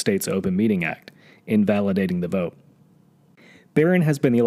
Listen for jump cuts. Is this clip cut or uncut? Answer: uncut